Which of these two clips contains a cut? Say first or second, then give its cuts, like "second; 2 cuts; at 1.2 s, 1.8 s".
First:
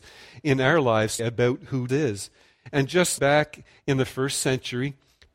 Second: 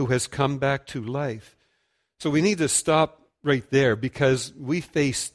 first; 3 cuts; at 1.2 s, 1.9 s, 3.2 s